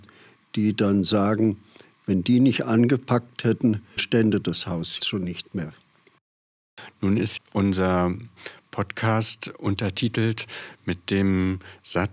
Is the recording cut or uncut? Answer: cut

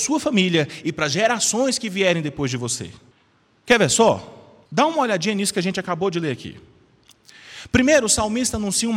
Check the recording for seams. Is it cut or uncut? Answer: cut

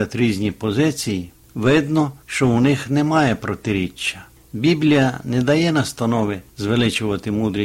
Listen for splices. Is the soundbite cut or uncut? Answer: uncut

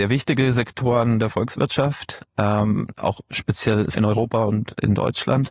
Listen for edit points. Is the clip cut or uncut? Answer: cut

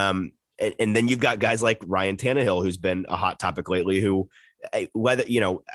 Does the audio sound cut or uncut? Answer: uncut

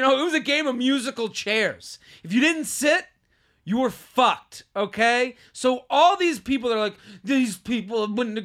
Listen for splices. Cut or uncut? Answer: uncut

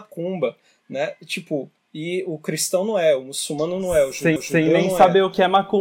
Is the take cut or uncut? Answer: cut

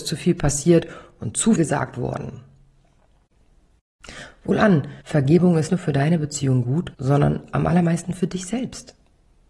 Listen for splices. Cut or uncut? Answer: cut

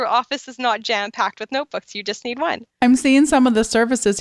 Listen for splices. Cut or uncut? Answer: cut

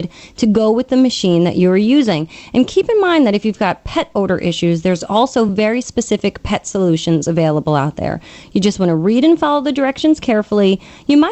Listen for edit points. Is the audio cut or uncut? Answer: uncut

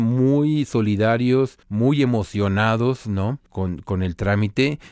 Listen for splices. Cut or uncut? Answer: cut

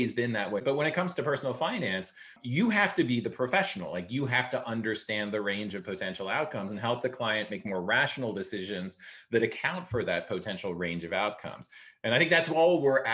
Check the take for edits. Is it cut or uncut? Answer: uncut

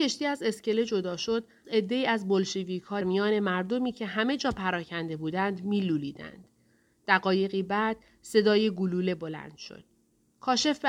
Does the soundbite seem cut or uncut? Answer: cut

